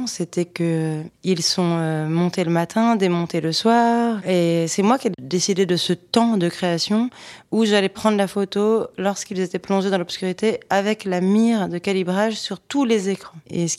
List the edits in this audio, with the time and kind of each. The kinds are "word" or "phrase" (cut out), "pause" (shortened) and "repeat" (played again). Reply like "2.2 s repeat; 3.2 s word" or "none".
none